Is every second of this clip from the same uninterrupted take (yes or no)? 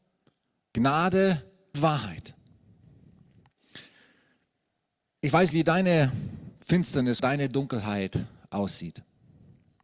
no